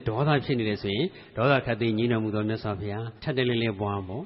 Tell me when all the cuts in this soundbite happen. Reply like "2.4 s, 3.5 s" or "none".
3.2 s